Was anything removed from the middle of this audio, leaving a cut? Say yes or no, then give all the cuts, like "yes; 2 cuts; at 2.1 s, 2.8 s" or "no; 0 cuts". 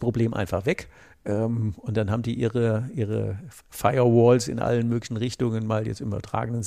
no; 0 cuts